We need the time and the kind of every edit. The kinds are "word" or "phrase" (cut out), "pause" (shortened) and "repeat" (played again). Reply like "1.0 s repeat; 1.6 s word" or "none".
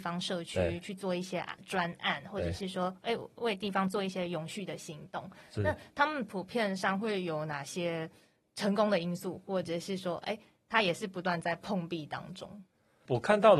none